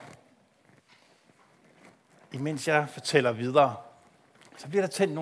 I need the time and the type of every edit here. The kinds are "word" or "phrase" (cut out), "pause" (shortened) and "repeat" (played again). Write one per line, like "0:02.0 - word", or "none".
none